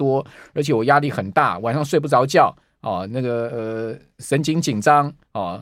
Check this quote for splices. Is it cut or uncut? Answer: uncut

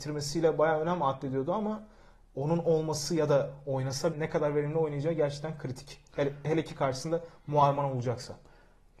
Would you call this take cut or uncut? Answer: cut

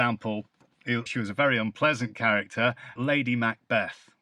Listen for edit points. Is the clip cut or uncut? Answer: cut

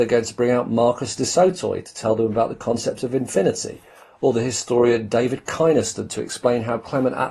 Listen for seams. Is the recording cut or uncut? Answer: uncut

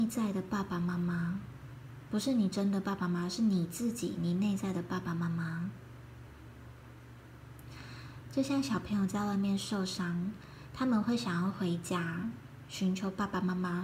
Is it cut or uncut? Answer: uncut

